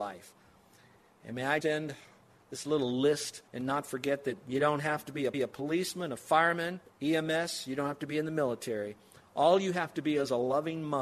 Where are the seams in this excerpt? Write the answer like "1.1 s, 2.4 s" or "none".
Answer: 1.6 s, 3.5 s, 5.3 s, 6.9 s